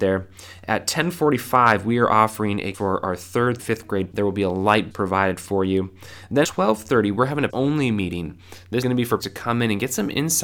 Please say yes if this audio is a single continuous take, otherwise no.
no